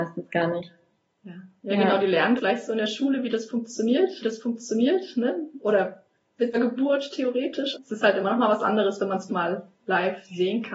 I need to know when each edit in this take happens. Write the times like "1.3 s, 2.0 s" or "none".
2.4 s, 4.2 s, 6.5 s, 7.7 s, 9.3 s